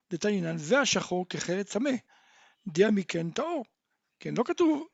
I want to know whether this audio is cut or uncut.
uncut